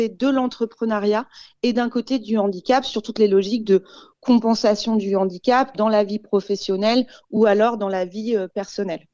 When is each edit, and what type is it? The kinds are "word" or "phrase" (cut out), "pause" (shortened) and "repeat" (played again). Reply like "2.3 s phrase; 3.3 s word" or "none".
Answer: none